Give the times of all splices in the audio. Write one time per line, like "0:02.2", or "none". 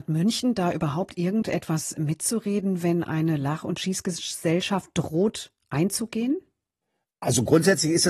none